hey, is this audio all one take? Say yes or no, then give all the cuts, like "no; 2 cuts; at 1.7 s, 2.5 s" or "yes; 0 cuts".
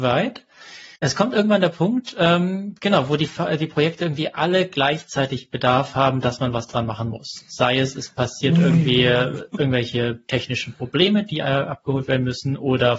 no; 1 cut; at 0.9 s